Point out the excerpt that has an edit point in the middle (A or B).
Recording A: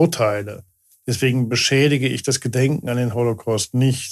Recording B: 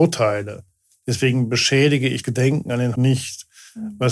B